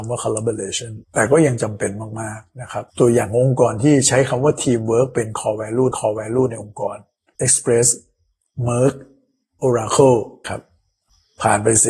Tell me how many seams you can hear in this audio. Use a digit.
5